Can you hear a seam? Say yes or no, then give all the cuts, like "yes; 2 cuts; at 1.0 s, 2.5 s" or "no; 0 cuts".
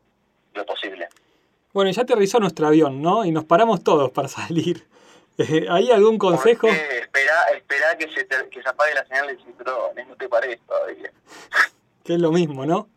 no; 0 cuts